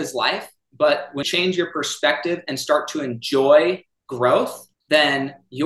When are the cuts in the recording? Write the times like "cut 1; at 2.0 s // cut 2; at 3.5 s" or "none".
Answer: cut 1; at 1.2 s